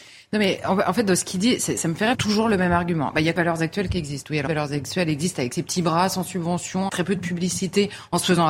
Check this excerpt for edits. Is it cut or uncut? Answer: cut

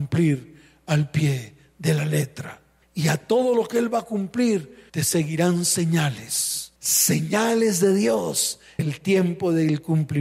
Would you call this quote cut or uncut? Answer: cut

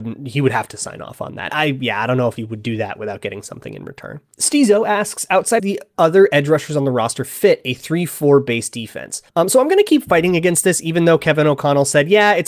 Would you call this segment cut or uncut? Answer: cut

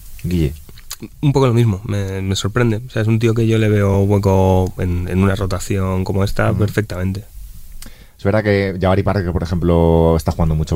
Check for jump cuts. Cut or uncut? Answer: uncut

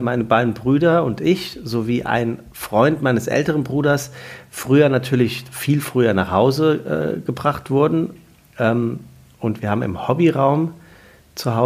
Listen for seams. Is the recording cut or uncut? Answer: cut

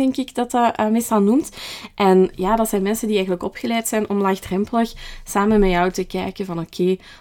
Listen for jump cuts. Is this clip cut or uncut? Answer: uncut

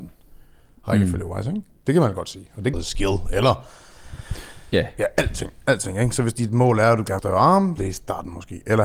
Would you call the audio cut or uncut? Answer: cut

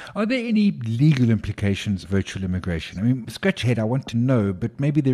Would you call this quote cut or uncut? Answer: cut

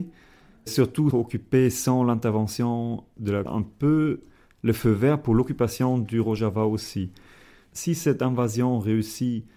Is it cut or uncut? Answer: cut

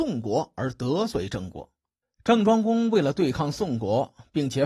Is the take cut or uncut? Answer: cut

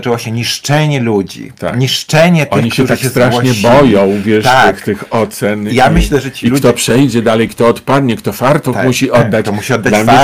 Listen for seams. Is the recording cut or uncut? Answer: uncut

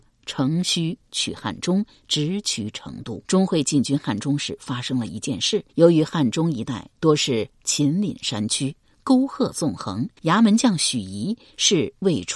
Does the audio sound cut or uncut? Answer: cut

